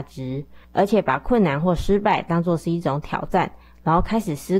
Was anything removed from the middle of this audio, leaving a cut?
no; 0 cuts

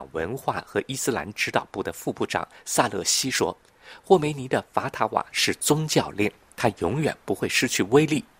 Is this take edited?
no; 0 cuts

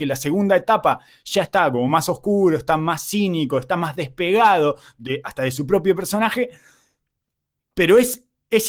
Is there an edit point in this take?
no; 0 cuts

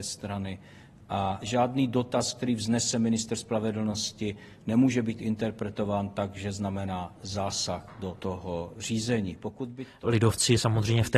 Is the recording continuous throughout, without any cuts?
yes; 0 cuts

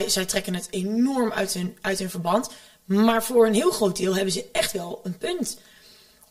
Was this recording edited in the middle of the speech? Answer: no; 0 cuts

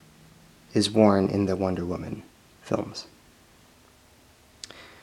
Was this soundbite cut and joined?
no; 0 cuts

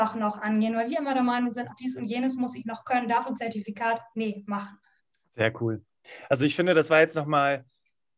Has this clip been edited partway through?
yes; 3 cuts; at 1.7 s, 3.3 s, 5.0 s

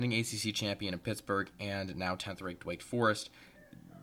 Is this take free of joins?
yes; 0 cuts

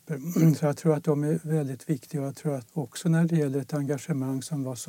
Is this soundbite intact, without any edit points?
no; 1 cut; at 2.7 s

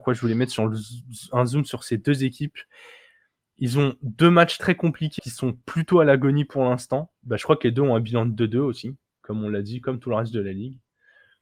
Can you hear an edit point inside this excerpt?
yes; 3 cuts; at 4.6 s, 5.2 s, 7.2 s

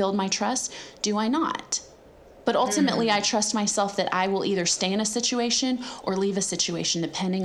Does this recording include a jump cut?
no; 0 cuts

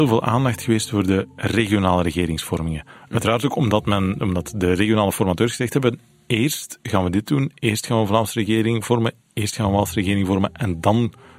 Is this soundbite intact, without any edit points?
yes; 0 cuts

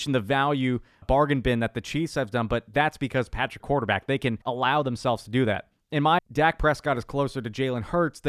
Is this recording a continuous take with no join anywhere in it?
no; 4 cuts; at 1.0 s, 3.6 s, 4.4 s, 6.2 s

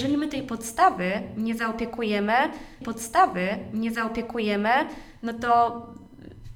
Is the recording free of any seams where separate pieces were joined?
no; 1 cut; at 2.8 s

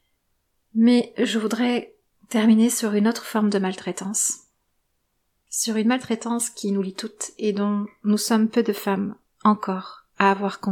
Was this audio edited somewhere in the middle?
no; 0 cuts

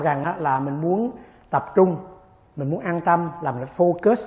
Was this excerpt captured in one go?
yes; 0 cuts

